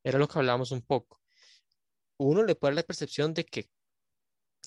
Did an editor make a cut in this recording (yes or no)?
no